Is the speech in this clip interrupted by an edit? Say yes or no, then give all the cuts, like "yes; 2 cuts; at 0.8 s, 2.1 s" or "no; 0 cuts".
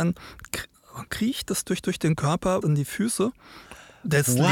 yes; 2 cuts; at 1.8 s, 2.6 s